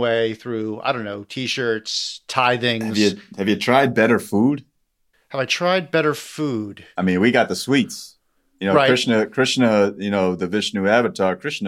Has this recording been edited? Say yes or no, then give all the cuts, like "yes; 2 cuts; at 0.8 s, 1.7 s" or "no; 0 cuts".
yes; 2 cuts; at 5.1 s, 8.4 s